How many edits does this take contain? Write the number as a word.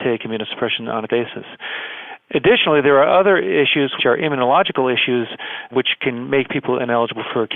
two